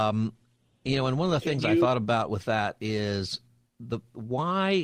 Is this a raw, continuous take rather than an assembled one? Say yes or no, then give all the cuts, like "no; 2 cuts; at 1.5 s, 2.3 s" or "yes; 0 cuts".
yes; 0 cuts